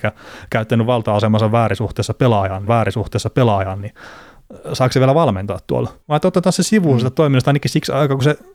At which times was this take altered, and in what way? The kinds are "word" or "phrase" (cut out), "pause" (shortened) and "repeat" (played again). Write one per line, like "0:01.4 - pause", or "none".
0:02.7 - repeat
0:06.0 - pause